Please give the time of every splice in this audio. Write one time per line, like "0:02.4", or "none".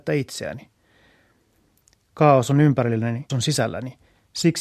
0:03.3